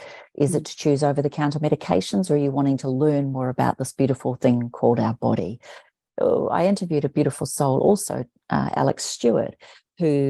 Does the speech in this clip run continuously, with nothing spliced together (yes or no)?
yes